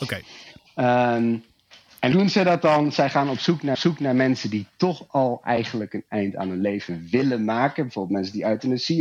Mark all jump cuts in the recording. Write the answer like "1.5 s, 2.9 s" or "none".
2.1 s, 3.7 s